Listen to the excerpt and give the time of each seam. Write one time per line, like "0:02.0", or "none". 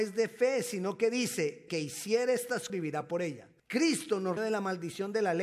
0:01.7
0:02.7
0:03.6
0:04.4